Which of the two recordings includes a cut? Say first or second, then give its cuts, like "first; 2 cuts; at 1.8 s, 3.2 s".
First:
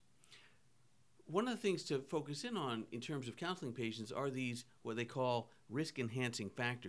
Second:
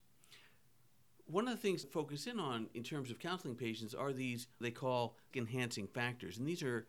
second; 3 cuts; at 1.8 s, 4.6 s, 5.3 s